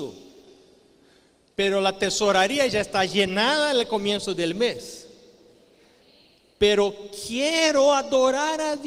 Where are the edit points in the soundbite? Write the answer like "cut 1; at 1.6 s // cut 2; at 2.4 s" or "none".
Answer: none

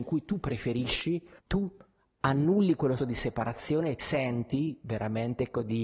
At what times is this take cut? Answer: cut 1; at 1.4 s // cut 2; at 3.0 s // cut 3; at 4.0 s

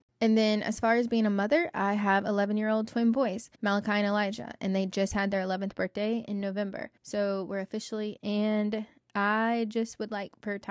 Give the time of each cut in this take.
cut 1; at 3.6 s // cut 2; at 7.0 s // cut 3; at 8.2 s

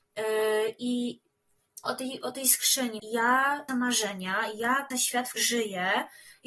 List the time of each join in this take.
cut 1; at 1.9 s // cut 2; at 3.0 s // cut 3; at 3.7 s // cut 4; at 4.9 s // cut 5; at 5.4 s

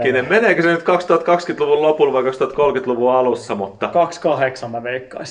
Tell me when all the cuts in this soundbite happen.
none

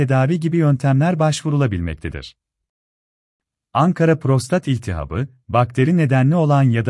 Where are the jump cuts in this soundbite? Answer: none

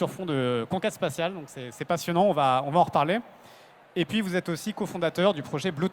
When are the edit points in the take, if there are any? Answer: none

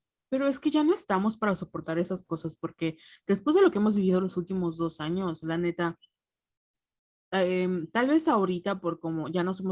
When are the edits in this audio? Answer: none

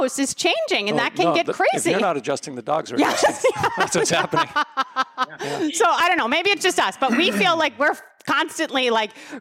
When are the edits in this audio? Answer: none

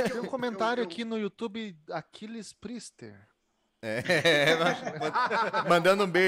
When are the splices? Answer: none

